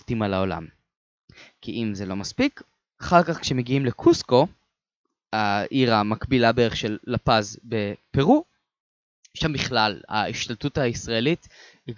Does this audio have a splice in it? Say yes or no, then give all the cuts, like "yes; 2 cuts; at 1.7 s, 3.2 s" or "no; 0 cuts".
no; 0 cuts